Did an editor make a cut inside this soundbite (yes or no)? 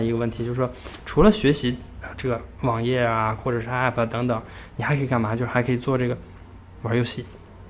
yes